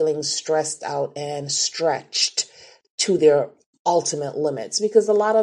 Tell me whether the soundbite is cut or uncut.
uncut